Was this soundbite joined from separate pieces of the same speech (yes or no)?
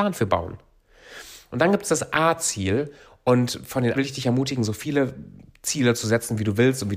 yes